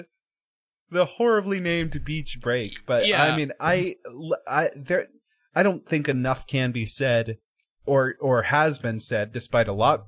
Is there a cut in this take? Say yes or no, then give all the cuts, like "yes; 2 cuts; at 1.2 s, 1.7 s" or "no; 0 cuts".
yes; 1 cut; at 7.5 s